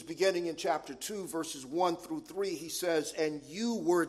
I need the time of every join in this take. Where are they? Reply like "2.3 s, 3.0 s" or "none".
none